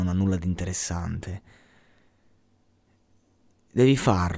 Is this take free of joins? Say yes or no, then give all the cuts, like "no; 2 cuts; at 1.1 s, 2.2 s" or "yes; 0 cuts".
yes; 0 cuts